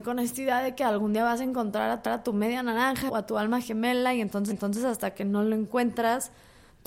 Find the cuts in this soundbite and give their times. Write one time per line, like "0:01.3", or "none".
0:02.1
0:03.1
0:04.5